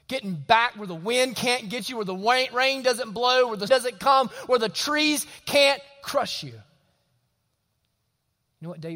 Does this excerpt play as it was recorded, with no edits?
no; 1 cut; at 3.7 s

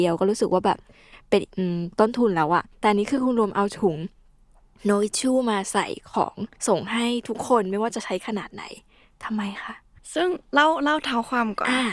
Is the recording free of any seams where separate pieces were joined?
no; 3 cuts; at 2.7 s, 6.6 s, 10.0 s

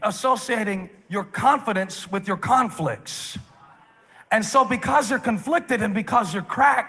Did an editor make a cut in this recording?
no; 0 cuts

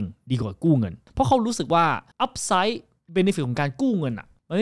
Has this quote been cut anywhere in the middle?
no; 0 cuts

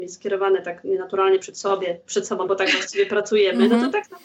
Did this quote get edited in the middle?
yes; 1 cut; at 2.5 s

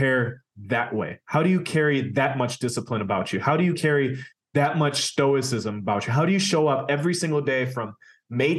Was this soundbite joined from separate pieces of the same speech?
no; 0 cuts

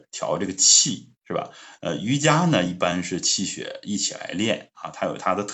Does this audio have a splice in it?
yes; 1 cut; at 1.2 s

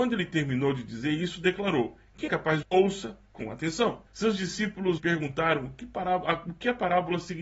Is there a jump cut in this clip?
yes; 4 cuts; at 2.3 s, 2.6 s, 4.1 s, 5.0 s

